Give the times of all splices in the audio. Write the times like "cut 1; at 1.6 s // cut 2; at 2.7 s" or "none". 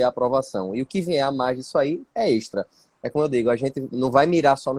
none